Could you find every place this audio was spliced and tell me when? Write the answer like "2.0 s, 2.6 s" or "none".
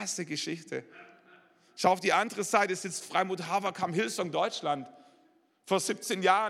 none